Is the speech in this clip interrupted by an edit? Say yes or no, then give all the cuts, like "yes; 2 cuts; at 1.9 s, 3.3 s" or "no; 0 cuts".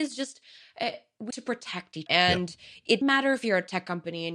yes; 3 cuts; at 1.3 s, 2.1 s, 3.0 s